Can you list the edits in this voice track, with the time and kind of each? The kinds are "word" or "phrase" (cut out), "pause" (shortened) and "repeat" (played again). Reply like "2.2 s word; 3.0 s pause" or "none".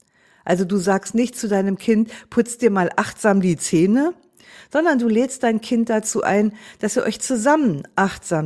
none